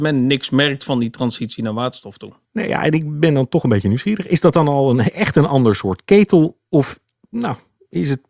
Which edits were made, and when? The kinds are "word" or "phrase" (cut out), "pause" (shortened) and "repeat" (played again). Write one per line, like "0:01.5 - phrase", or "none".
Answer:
none